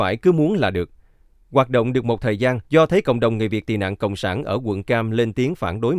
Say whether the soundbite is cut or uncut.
cut